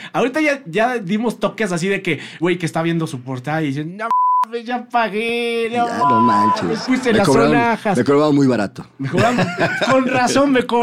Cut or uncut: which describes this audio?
cut